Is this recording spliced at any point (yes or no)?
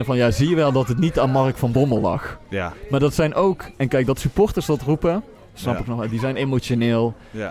no